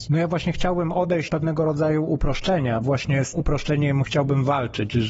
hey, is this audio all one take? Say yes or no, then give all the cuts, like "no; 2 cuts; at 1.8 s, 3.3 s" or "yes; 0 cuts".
no; 3 cuts; at 1.3 s, 2.8 s, 3.3 s